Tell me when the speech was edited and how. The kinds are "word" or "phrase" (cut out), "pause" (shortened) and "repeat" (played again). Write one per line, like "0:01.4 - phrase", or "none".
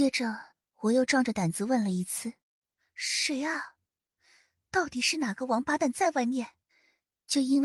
0:02.4 - pause
0:06.6 - pause